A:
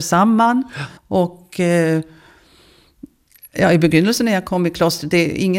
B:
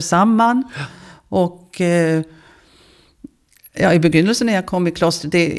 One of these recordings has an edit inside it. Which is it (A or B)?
A